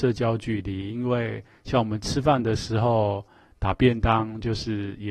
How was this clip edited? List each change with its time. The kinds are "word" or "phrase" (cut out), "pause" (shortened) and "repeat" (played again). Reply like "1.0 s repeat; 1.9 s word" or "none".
none